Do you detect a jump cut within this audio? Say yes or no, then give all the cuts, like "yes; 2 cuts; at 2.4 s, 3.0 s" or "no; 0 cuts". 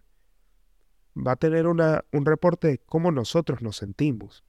no; 0 cuts